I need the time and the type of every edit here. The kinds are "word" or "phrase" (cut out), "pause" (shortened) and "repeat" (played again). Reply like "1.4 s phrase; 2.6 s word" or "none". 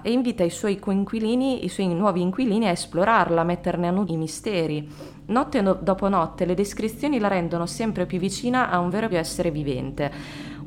4.1 s word; 9.1 s word